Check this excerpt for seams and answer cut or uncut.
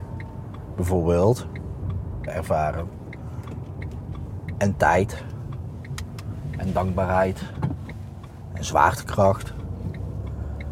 cut